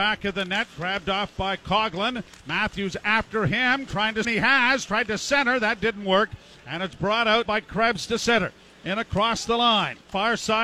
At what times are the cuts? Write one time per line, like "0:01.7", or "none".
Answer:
0:04.2
0:07.5